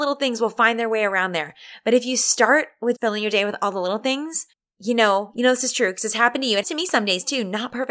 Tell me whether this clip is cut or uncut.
cut